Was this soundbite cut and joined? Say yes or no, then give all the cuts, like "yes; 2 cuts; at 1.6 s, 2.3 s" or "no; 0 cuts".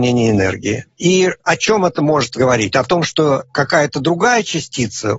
no; 0 cuts